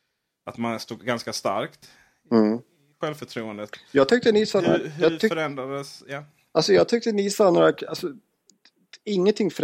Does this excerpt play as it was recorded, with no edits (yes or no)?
yes